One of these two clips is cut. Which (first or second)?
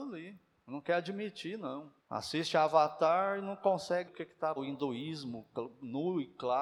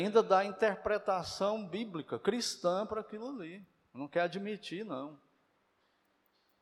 first